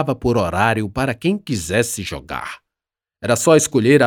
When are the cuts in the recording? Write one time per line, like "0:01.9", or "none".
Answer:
none

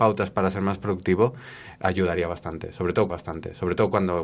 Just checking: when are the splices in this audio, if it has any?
0:03.1

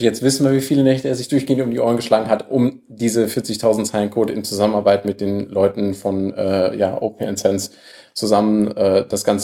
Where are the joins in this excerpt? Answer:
none

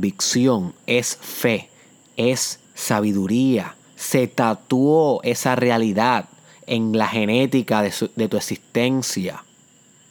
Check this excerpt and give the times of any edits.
0:02.6

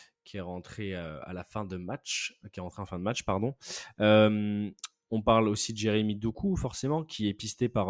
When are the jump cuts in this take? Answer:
none

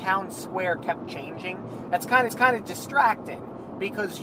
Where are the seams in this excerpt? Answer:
0:02.3

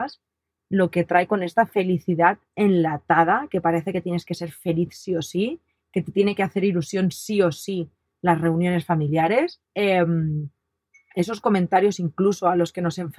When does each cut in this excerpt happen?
0:09.6

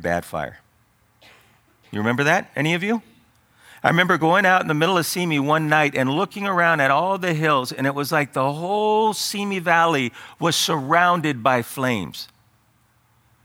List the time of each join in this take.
none

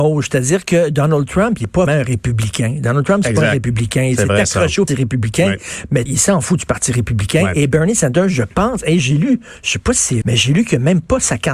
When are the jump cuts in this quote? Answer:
0:01.9
0:04.9
0:06.1
0:10.2

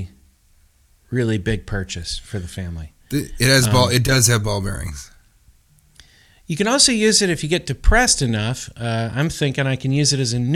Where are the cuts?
none

